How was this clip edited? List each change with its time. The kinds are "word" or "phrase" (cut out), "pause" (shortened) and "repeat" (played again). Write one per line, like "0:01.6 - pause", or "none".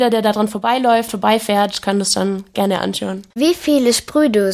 0:03.3 - pause